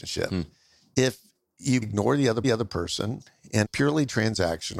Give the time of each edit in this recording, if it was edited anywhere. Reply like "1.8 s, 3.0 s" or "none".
1.8 s, 2.4 s, 3.6 s